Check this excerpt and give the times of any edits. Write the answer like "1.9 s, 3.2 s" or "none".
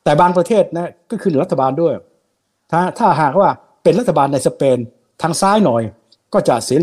none